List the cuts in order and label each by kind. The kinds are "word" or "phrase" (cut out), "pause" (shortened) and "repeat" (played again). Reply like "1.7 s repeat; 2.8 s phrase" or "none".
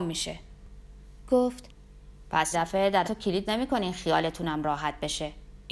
2.5 s phrase; 3.0 s word; 3.4 s word